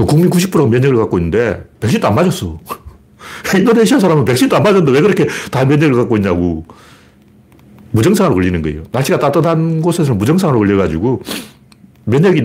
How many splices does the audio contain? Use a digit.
0